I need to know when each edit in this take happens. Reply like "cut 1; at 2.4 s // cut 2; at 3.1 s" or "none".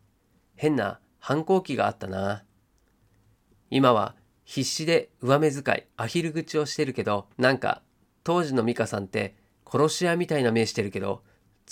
cut 1; at 5.9 s // cut 2; at 7.3 s